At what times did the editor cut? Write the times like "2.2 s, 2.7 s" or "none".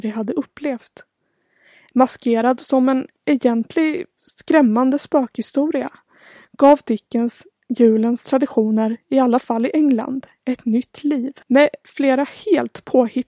11.4 s